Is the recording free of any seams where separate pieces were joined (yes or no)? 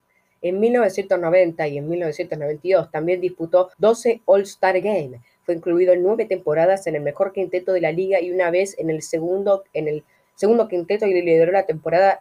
no